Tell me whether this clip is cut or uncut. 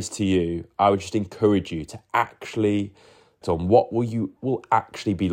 cut